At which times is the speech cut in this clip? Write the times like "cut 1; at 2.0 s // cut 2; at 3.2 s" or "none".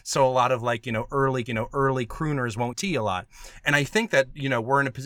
cut 1; at 1.5 s // cut 2; at 2.7 s